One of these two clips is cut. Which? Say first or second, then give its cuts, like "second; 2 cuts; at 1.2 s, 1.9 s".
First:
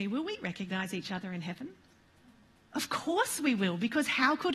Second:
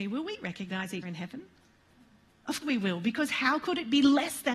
second; 2 cuts; at 1.0 s, 2.6 s